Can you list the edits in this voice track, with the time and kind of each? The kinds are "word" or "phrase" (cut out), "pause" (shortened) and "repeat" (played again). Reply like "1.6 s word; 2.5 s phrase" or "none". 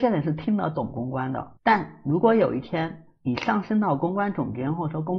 1.6 s pause